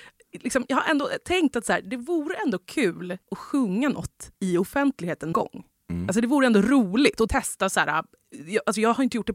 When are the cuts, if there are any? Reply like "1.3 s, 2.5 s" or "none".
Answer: 3.2 s, 4.3 s, 5.3 s, 7.3 s